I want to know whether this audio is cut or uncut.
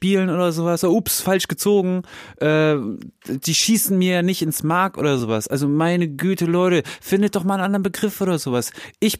uncut